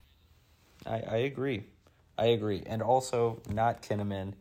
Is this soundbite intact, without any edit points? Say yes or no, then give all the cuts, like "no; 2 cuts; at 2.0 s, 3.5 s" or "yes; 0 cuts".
yes; 0 cuts